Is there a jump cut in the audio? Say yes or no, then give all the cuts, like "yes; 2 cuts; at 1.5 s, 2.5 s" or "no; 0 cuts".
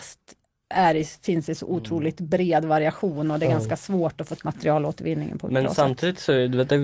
yes; 1 cut; at 4.4 s